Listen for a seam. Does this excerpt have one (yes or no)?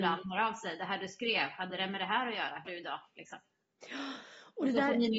yes